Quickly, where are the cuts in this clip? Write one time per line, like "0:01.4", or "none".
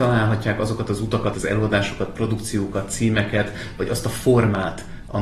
0:01.3